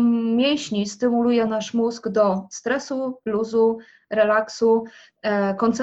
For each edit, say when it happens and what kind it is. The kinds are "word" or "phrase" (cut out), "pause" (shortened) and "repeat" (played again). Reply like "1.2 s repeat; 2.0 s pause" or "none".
none